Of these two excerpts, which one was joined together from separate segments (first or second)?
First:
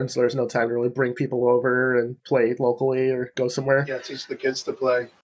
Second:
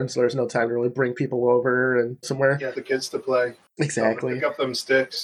second